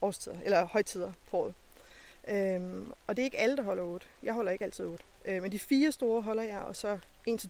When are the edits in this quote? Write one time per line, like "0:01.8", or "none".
0:05.1